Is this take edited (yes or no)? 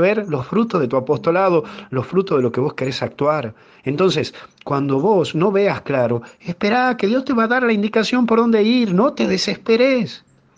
no